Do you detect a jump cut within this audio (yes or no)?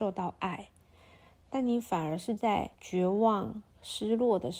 yes